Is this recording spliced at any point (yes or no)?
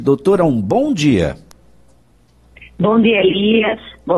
no